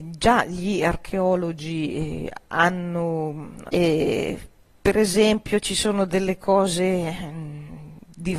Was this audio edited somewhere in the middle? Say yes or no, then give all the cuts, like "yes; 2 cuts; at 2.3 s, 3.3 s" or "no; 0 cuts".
yes; 1 cut; at 3.7 s